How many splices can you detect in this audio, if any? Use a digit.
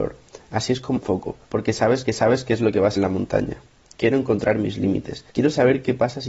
5